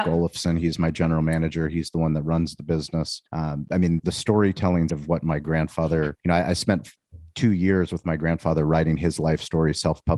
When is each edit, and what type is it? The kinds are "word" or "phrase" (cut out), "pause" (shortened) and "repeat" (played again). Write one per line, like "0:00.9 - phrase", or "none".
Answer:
0:03.3 - pause
0:04.0 - word
0:04.9 - word
0:06.2 - pause

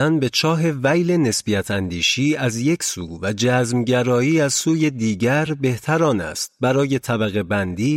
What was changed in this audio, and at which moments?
none

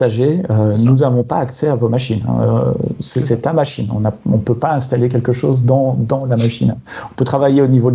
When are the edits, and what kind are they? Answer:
none

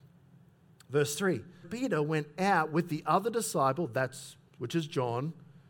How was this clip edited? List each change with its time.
0:01.6 - word

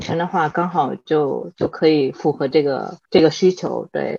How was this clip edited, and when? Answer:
0:03.0 - pause

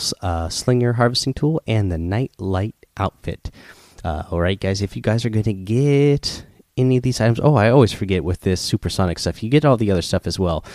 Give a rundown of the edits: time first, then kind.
none

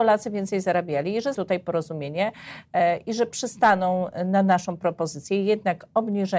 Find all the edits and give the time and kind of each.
0:01.3 - word

